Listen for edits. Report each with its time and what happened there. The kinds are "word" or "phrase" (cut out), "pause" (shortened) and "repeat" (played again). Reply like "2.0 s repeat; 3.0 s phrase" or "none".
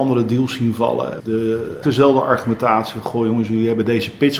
1.2 s word; 1.8 s word